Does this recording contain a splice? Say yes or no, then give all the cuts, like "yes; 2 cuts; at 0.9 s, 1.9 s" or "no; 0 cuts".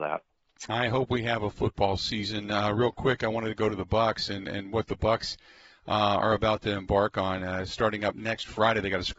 no; 0 cuts